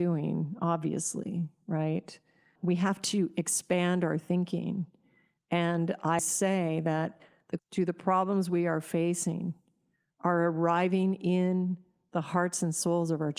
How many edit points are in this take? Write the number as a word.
two